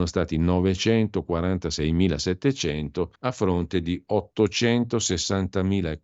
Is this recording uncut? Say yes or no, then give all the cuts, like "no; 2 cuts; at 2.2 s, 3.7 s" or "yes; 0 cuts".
no; 1 cut; at 3.1 s